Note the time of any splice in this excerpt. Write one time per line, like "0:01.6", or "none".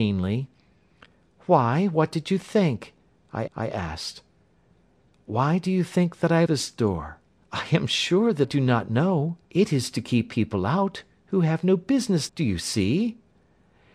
0:03.5
0:06.5
0:07.4
0:08.4
0:09.4
0:12.3